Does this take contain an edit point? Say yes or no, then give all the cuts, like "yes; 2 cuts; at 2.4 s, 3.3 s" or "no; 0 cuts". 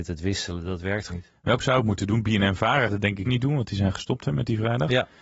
yes; 4 cuts; at 1.1 s, 1.6 s, 2.9 s, 3.3 s